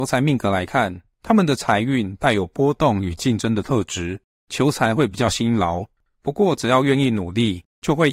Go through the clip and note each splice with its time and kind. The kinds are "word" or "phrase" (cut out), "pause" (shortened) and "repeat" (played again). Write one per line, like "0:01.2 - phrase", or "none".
none